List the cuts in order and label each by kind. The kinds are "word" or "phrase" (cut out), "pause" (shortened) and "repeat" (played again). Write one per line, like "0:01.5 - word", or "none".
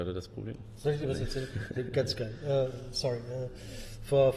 none